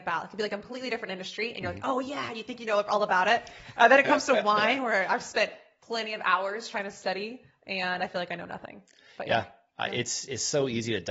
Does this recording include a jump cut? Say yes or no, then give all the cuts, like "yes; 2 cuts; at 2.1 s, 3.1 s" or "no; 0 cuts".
no; 0 cuts